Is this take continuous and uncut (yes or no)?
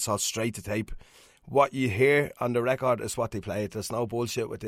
yes